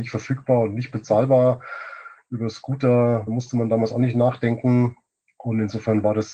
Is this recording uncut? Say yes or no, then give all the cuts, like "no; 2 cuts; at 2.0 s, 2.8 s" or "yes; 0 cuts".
no; 1 cut; at 3.3 s